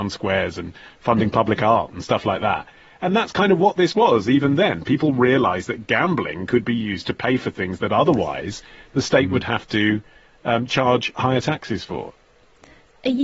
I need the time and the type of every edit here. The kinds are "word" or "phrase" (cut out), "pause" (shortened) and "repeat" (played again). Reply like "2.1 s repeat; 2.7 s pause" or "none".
none